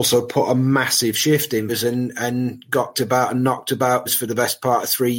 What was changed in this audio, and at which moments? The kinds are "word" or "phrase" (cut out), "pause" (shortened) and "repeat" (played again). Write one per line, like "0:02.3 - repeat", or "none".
0:01.7 - word
0:02.9 - word
0:04.1 - word